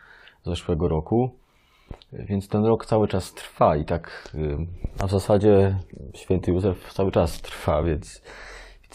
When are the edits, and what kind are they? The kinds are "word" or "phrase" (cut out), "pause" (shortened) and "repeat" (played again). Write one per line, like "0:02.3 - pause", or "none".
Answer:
none